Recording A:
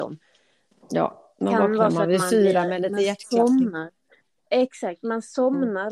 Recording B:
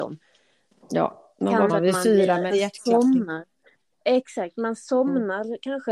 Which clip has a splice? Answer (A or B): B